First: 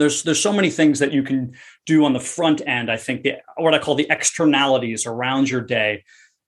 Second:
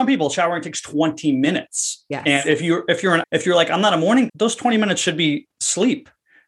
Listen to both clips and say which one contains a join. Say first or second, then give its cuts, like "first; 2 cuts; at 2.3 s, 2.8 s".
second; 2 cuts; at 3.2 s, 4.3 s